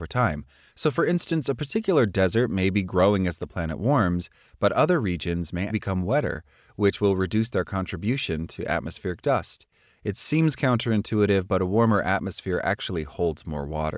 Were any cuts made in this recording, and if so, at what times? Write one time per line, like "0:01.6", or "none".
0:05.7